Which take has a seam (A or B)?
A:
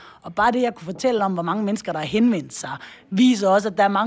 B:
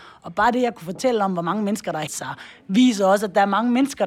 B